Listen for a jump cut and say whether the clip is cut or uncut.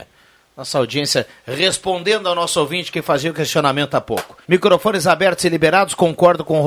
cut